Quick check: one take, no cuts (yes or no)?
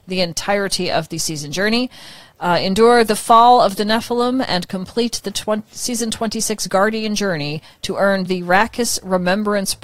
yes